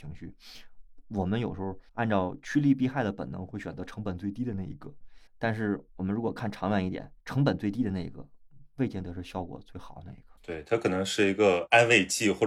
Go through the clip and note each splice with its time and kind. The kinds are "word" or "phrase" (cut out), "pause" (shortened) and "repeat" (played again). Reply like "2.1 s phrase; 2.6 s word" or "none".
1.9 s pause; 5.3 s pause; 5.9 s pause; 7.2 s pause; 10.4 s pause

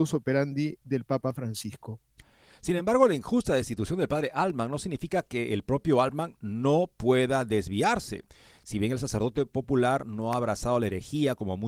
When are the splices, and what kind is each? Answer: none

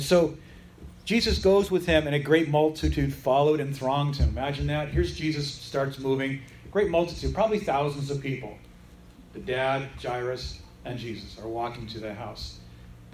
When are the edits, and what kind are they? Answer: none

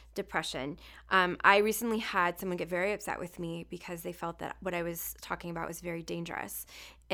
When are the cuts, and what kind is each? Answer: none

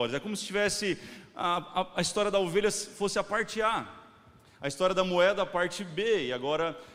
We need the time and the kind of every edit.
none

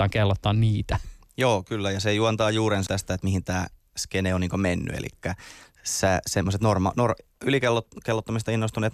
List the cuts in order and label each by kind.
2.9 s word

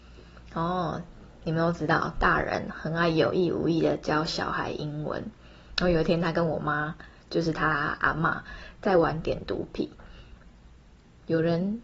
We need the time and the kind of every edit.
none

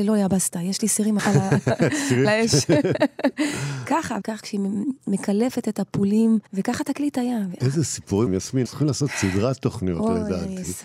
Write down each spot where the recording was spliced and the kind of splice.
1.2 s phrase; 2.2 s phrase; 4.2 s phrase; 6.5 s pause; 8.3 s word; 8.7 s word

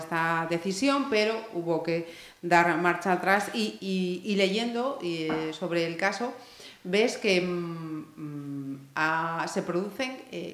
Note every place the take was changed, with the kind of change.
none

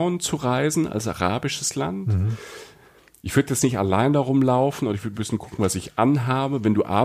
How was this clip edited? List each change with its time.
none

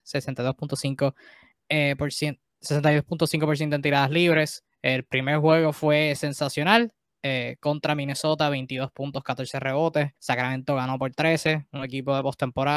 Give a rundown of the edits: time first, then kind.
10.2 s pause

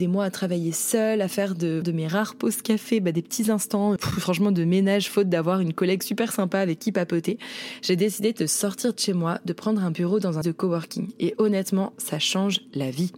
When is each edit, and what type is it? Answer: 1.8 s word; 4.0 s word; 10.4 s word

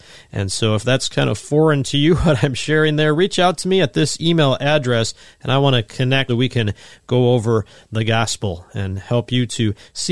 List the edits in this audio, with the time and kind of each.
6.3 s word

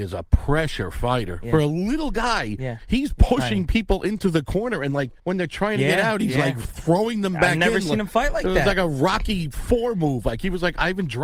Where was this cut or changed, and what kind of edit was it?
5.2 s pause

